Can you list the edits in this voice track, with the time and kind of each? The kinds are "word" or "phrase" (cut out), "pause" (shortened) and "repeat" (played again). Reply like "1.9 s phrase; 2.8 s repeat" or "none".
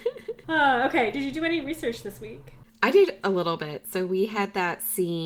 3.2 s word